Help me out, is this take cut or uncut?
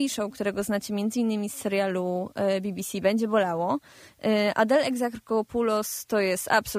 uncut